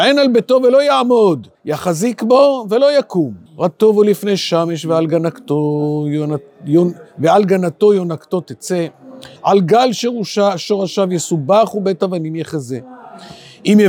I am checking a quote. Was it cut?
yes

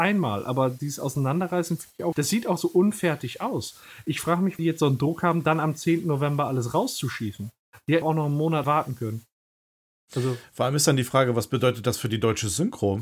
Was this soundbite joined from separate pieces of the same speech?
yes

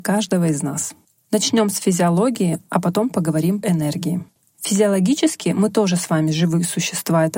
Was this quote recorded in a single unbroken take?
no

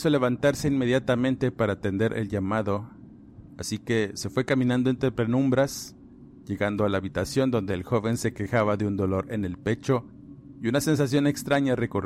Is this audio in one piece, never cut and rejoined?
yes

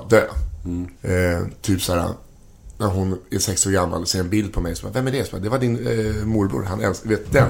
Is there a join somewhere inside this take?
yes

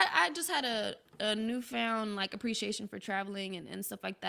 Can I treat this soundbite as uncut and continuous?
yes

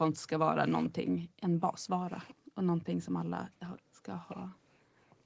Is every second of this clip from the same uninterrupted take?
yes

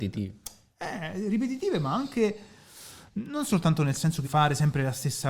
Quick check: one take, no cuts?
no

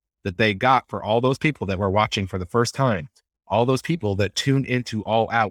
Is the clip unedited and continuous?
yes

